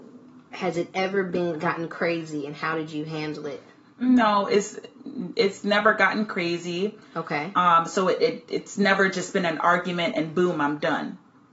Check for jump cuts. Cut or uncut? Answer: uncut